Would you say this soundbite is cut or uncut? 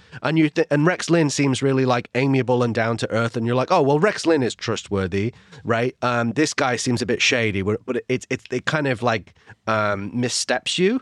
uncut